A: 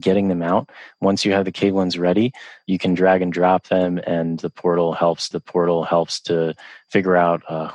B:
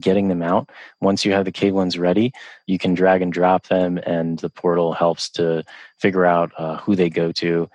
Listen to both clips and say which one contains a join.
A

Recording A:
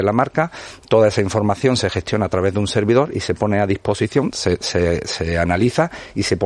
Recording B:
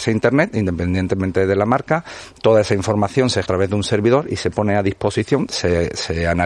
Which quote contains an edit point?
B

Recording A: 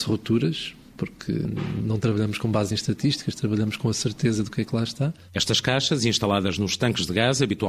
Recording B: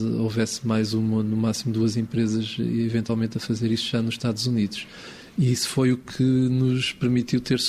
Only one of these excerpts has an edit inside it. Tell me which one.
A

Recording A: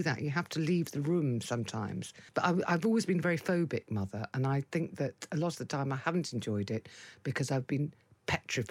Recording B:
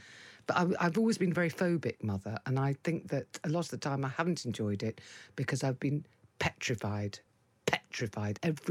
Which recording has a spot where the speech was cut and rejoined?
A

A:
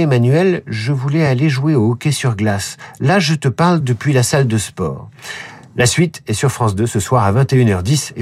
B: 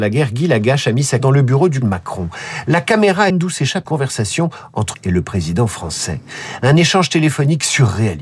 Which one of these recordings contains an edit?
B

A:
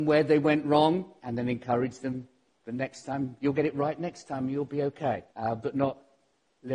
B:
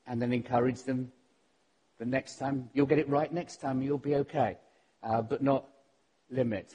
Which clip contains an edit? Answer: A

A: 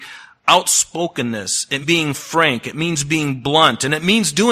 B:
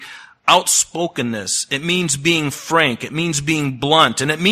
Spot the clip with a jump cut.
A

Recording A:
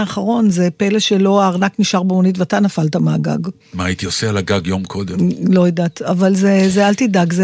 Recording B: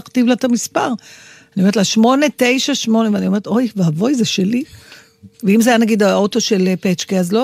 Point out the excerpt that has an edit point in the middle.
A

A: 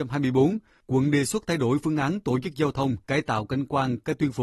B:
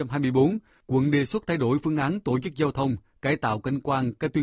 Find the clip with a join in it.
A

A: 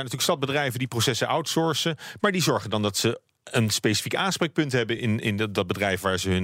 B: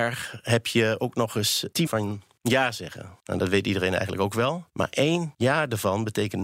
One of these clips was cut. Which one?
B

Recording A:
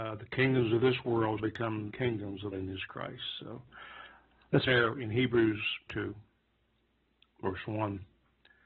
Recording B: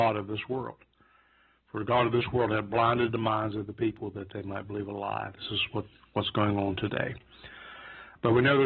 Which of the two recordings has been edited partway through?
A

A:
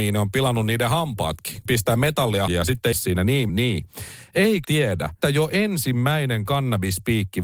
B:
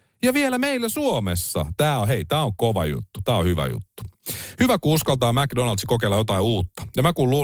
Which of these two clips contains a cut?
A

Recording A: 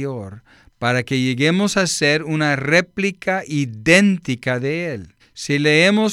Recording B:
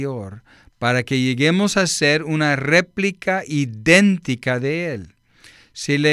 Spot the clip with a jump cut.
A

